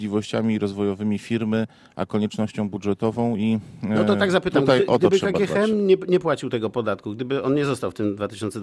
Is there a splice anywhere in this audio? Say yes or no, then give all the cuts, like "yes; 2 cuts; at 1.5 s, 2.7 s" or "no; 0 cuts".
no; 0 cuts